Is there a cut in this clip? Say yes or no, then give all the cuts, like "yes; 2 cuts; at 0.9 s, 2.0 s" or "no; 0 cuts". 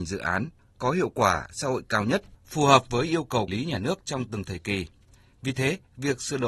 yes; 1 cut; at 3.5 s